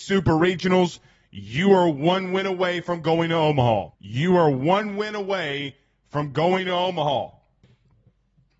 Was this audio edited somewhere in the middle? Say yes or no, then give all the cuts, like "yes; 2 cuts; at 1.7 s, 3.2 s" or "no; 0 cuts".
yes; 1 cut; at 3.9 s